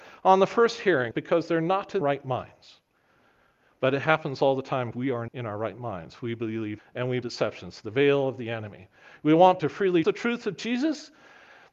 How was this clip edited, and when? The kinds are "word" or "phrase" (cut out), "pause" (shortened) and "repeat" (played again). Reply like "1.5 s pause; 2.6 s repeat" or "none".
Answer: 1.1 s word; 2.0 s word; 4.9 s word; 5.3 s word; 6.8 s word; 7.2 s word; 9.6 s word; 10.0 s word